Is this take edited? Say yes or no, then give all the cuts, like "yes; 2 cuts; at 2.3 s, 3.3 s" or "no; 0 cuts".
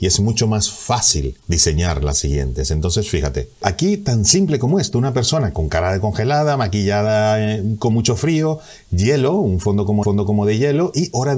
yes; 2 cuts; at 1.4 s, 10.0 s